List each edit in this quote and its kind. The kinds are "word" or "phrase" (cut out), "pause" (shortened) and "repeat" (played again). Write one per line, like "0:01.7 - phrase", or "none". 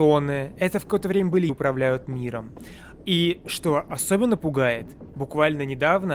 0:01.5 - word